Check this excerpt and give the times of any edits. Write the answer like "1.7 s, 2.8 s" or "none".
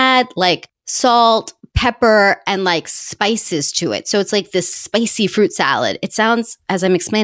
none